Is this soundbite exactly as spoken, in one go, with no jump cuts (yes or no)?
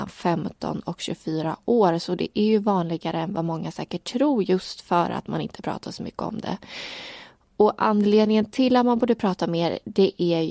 yes